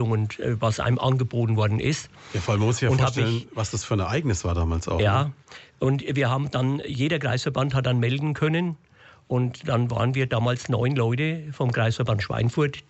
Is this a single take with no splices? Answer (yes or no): yes